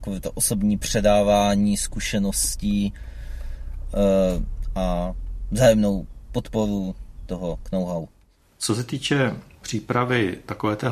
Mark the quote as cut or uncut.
uncut